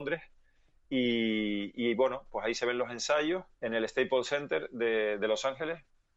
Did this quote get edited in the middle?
yes; 1 cut; at 3.5 s

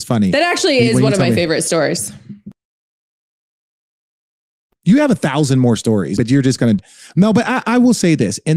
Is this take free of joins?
no; 2 cuts; at 6.2 s, 6.8 s

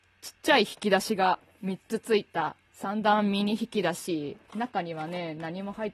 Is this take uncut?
no; 2 cuts; at 2.7 s, 4.4 s

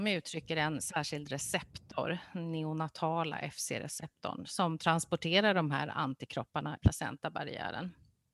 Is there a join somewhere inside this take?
yes; 1 cut; at 6.8 s

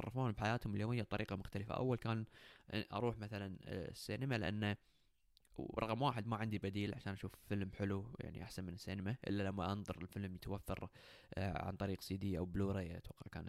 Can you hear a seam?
no; 0 cuts

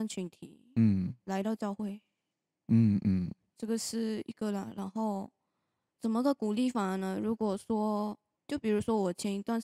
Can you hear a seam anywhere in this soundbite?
no; 0 cuts

